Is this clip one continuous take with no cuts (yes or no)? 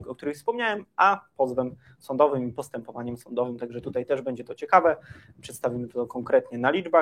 yes